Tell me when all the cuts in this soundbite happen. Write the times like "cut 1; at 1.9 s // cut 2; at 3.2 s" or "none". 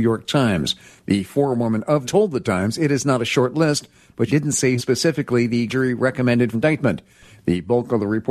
cut 1; at 2.0 s // cut 2; at 4.3 s // cut 3; at 4.8 s // cut 4; at 5.7 s // cut 5; at 6.5 s